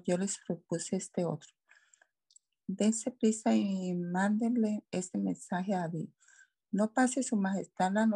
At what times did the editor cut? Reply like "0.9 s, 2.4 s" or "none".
none